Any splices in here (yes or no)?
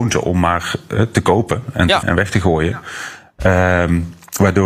yes